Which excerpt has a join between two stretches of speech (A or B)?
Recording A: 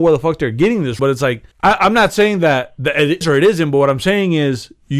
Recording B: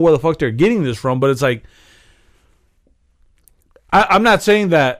A